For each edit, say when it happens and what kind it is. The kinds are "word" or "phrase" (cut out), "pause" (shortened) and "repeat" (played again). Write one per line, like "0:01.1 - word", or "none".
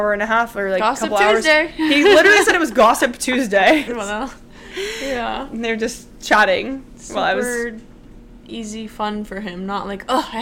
0:03.9 - phrase